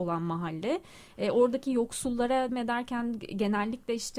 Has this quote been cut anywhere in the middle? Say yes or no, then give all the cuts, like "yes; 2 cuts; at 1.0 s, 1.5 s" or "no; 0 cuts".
yes; 1 cut; at 2.5 s